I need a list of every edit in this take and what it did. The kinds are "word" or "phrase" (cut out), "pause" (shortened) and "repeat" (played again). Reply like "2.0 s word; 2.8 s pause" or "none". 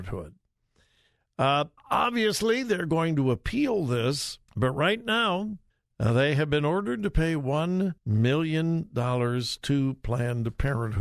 1.8 s pause; 4.5 s pause; 5.7 s pause; 8.0 s pause